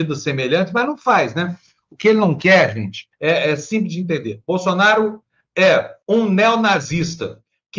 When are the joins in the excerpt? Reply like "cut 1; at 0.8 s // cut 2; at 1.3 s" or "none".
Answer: cut 1; at 3.1 s // cut 2; at 6.0 s